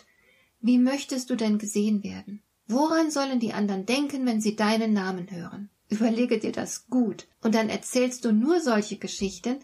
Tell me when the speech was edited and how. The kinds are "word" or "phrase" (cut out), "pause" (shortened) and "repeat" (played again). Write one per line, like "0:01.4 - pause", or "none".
0:02.5 - pause
0:05.8 - pause
0:07.3 - pause